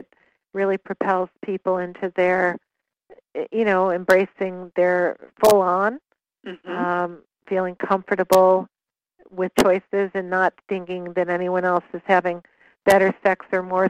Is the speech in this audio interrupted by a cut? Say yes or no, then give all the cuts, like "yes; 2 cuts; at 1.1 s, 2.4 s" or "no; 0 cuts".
yes; 2 cuts; at 5.3 s, 9.5 s